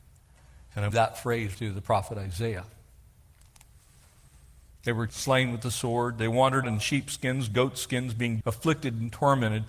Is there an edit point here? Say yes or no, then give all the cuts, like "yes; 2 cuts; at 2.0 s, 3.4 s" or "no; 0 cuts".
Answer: yes; 5 cuts; at 0.9 s, 1.5 s, 5.1 s, 6.6 s, 8.4 s